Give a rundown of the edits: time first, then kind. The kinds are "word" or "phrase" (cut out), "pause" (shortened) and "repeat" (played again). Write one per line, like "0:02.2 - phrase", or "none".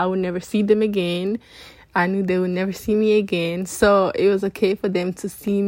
none